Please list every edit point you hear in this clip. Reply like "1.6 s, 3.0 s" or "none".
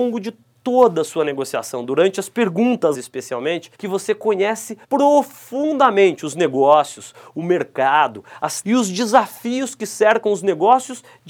2.9 s, 3.7 s, 4.8 s, 8.6 s